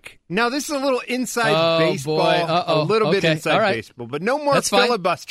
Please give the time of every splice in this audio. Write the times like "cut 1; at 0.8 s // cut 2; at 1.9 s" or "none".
none